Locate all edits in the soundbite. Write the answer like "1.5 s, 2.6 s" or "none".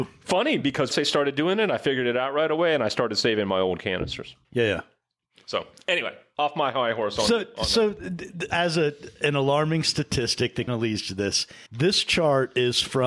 0.9 s, 4.4 s, 8.5 s, 10.7 s, 11.7 s